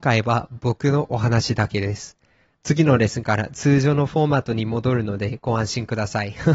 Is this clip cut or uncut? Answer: uncut